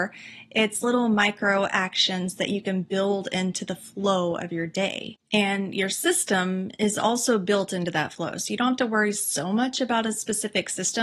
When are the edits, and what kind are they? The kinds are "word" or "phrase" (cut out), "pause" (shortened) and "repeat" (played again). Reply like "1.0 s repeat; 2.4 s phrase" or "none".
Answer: none